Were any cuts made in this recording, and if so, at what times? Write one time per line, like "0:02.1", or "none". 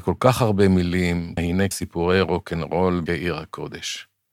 0:01.4
0:01.7
0:03.1